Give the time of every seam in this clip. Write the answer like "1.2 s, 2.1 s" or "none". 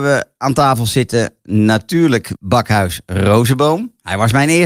2.4 s